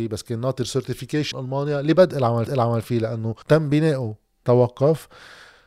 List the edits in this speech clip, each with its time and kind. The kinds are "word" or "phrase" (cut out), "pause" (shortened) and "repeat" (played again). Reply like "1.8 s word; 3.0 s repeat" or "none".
1.3 s word; 2.5 s repeat; 3.4 s pause; 4.4 s word